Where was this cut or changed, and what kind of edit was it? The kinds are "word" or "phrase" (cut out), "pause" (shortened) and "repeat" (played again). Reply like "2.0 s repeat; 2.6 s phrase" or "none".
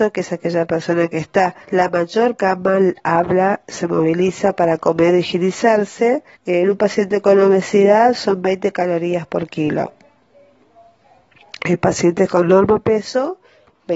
1.6 s pause; 2.4 s phrase; 6.3 s pause